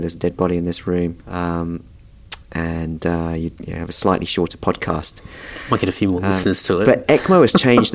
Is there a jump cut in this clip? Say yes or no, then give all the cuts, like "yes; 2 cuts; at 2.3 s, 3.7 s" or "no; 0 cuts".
yes; 2 cuts; at 1.2 s, 3.6 s